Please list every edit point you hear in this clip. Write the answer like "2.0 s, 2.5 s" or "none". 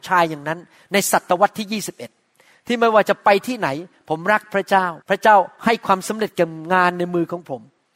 5.0 s